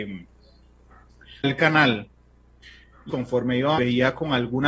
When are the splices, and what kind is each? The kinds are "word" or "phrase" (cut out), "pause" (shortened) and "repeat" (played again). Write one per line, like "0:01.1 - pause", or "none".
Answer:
0:01.4 - word
0:03.1 - word
0:03.8 - word

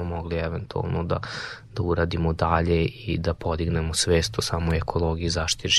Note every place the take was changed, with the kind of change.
none

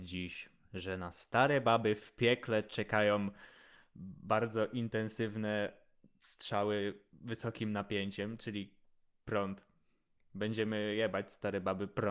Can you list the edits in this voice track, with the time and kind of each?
none

